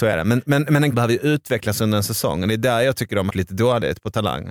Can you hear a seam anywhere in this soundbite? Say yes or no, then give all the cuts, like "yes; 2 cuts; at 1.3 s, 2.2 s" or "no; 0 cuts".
yes; 2 cuts; at 0.9 s, 3.3 s